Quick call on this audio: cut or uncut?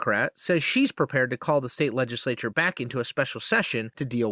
uncut